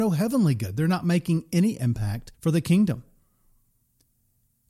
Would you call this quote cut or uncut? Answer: cut